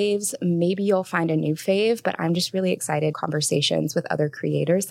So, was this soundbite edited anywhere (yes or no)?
yes